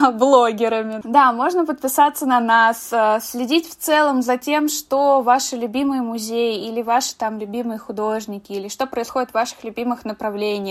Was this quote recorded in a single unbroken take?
yes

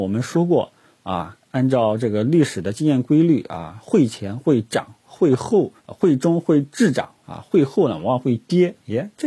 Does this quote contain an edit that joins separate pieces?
yes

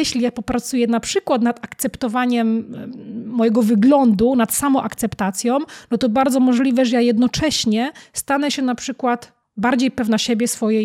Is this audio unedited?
yes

